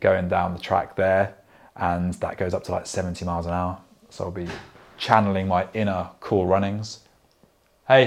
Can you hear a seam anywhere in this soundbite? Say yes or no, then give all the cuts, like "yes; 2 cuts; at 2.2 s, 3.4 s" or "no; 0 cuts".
no; 0 cuts